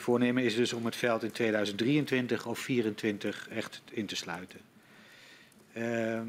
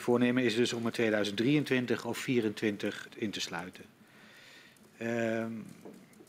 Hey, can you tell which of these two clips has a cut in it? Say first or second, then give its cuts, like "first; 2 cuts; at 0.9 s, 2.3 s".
second; 2 cuts; at 0.9 s, 3.1 s